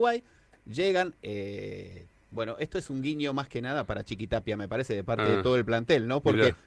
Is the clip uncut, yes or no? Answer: yes